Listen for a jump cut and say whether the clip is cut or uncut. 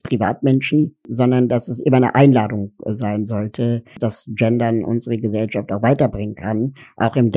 cut